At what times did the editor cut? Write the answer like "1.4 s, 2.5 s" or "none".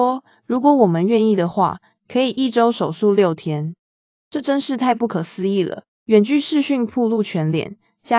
3.8 s, 5.9 s